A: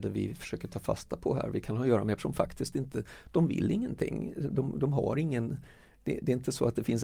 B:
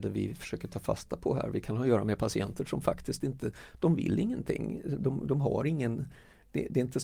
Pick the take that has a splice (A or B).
A